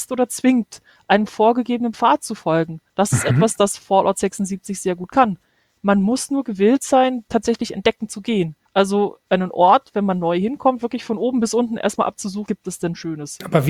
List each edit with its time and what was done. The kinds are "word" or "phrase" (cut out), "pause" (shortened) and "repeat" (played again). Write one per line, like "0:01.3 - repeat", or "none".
0:02.9 - pause
0:08.7 - pause
0:12.5 - phrase